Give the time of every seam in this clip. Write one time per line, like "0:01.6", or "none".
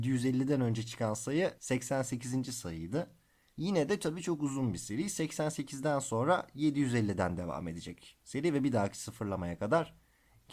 none